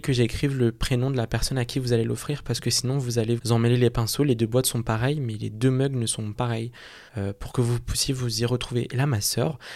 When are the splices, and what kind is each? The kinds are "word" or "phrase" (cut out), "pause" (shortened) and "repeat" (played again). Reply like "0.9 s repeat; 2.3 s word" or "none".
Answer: 3.4 s word; 6.4 s word; 7.1 s pause